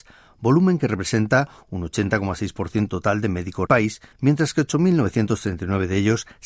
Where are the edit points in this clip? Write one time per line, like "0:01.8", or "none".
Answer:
0:02.9
0:03.7
0:04.1